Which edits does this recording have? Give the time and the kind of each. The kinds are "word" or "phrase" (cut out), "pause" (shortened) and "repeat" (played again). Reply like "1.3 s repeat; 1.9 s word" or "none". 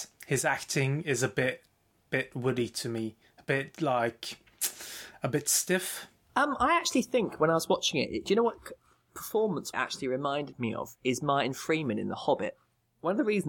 9.7 s phrase

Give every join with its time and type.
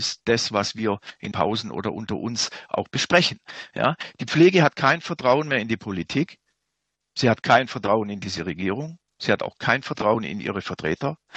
1.3 s word

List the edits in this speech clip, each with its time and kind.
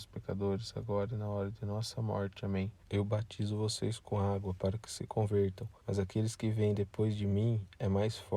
2.8 s pause; 5.8 s pause

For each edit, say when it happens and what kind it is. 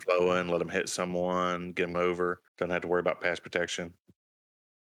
1.9 s phrase; 2.5 s pause

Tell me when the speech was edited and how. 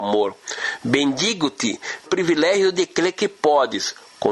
2.1 s word

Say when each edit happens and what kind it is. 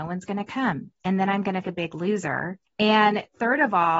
1.6 s phrase; 2.7 s pause

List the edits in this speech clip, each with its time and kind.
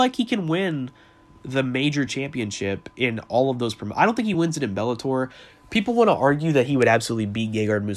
none

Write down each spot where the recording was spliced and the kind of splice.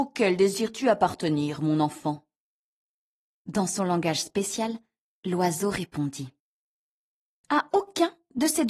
none

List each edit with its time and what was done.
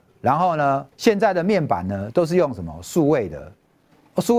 0.9 s pause

